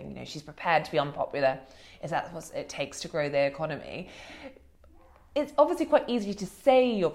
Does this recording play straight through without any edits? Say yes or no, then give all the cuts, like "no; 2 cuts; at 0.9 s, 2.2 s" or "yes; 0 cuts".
yes; 0 cuts